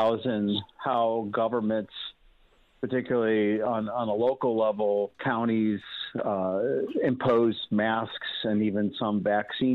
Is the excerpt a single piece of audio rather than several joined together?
yes; 0 cuts

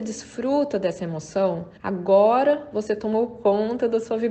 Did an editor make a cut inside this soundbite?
yes; 1 cut; at 1.8 s

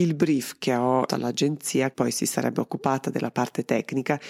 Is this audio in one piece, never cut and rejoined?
no; 2 cuts; at 1.1 s, 1.9 s

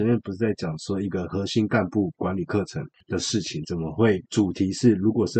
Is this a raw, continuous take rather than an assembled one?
no; 1 cut; at 4.3 s

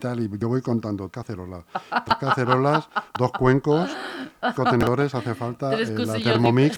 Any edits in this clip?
yes; 2 cuts; at 1.1 s, 4.6 s

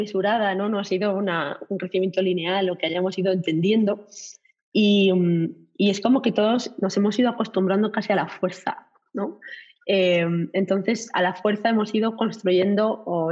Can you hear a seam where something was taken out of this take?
no; 0 cuts

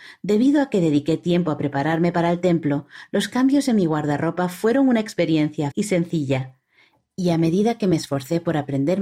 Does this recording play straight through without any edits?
no; 1 cut; at 5.7 s

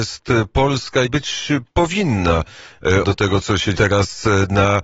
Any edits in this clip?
yes; 3 cuts; at 1.0 s, 3.0 s, 3.7 s

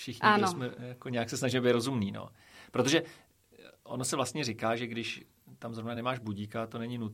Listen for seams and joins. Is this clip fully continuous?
yes; 0 cuts

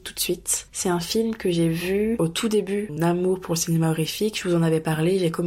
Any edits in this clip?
no; 0 cuts

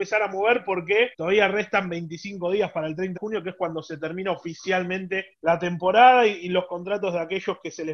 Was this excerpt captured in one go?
no; 3 cuts; at 1.1 s, 3.2 s, 5.3 s

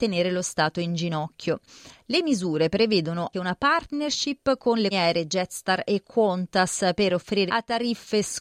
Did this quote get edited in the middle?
yes; 3 cuts; at 3.3 s, 4.9 s, 7.5 s

